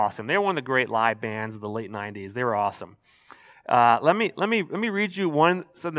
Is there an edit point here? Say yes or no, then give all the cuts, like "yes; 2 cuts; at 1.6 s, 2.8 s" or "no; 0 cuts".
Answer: no; 0 cuts